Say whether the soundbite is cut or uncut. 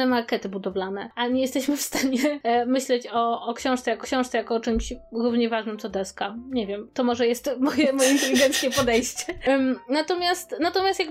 cut